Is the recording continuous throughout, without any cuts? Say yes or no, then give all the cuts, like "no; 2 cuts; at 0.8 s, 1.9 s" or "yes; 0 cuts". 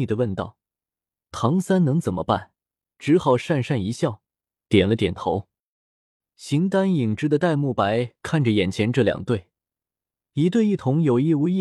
yes; 0 cuts